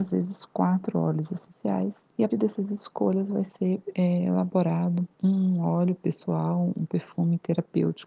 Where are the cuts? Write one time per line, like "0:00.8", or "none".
0:02.3
0:05.1

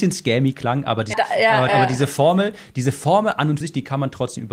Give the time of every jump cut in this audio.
0:01.1
0:01.7
0:03.6

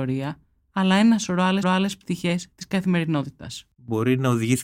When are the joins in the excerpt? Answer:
0:01.6

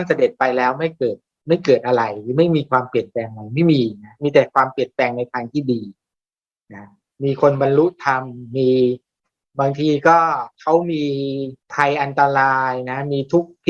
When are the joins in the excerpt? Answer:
0:11.6

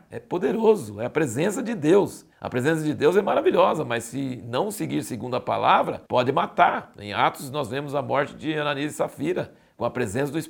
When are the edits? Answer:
0:02.3
0:06.1

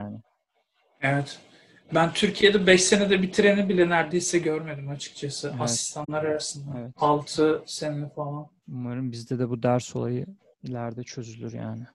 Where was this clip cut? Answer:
none

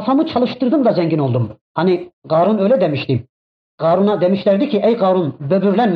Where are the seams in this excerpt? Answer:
0:01.6

